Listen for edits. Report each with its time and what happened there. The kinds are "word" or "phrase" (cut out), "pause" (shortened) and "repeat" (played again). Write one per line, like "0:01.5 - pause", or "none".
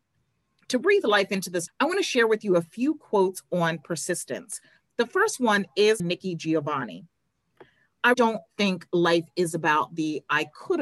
0:01.7 - word
0:06.0 - word
0:08.1 - word